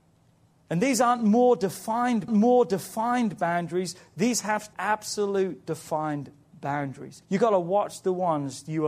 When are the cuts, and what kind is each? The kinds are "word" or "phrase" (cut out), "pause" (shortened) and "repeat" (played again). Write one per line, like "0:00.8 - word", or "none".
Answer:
0:02.3 - repeat
0:04.7 - phrase
0:07.2 - pause